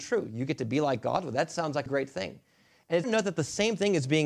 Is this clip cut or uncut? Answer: cut